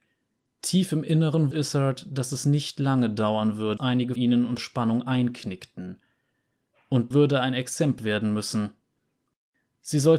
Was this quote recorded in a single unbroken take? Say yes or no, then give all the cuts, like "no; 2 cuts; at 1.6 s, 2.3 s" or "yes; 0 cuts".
no; 6 cuts; at 1.5 s, 3.8 s, 4.2 s, 4.6 s, 7.1 s, 8.0 s